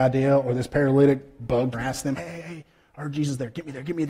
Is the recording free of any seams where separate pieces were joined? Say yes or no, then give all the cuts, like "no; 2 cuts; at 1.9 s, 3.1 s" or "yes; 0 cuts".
no; 2 cuts; at 1.7 s, 2.2 s